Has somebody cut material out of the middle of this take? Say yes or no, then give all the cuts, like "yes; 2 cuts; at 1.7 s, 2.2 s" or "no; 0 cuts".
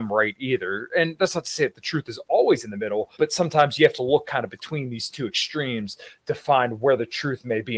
yes; 1 cut; at 3.1 s